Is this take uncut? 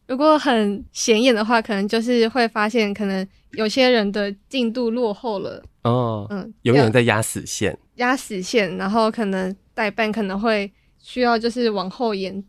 no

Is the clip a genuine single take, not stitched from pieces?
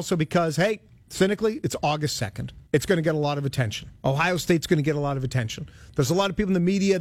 no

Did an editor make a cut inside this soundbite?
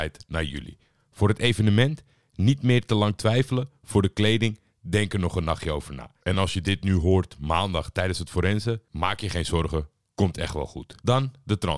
no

